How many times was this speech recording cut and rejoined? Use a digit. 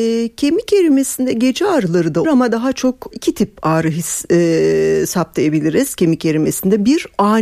2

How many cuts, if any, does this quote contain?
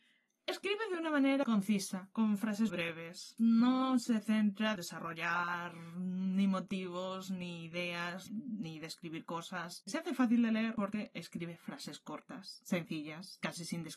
4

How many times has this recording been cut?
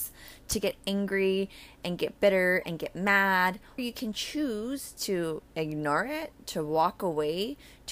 2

